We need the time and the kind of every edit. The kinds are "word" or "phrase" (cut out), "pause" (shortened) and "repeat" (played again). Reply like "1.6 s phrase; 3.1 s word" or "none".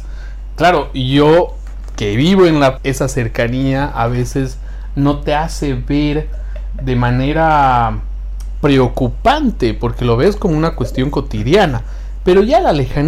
2.8 s word